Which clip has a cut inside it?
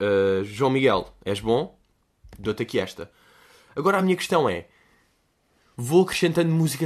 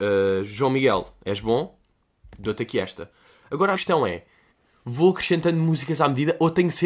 second; 3 cuts; at 3.2 s, 3.7 s, 4.5 s

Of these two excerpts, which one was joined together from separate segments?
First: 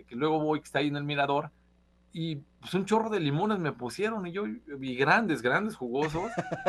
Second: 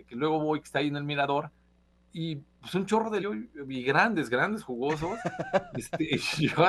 second; 1 cut; at 3.2 s

